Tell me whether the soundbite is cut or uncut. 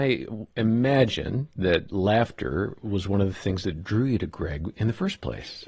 uncut